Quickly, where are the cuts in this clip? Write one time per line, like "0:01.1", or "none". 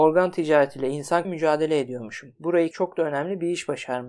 0:01.2
0:02.7